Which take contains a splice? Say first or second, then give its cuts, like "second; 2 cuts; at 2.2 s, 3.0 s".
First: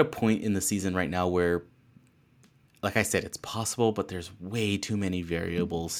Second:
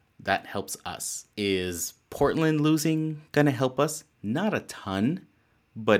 second; 1 cut; at 1.3 s